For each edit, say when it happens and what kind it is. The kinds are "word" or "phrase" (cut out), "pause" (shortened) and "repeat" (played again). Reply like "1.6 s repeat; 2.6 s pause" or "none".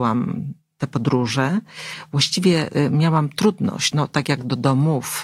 3.9 s word